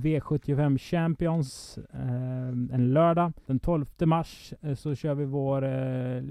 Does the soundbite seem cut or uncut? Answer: cut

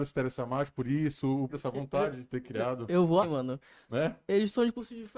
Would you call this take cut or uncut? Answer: cut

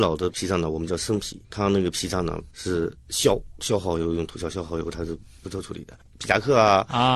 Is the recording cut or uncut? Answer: cut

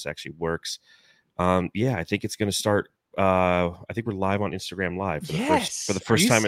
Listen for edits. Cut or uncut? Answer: uncut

